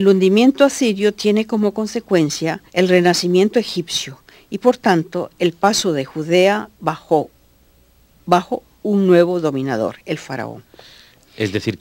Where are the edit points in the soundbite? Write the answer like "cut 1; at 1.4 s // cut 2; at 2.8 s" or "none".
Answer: cut 1; at 2.7 s